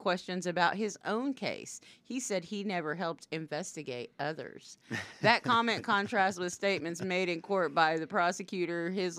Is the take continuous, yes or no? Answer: yes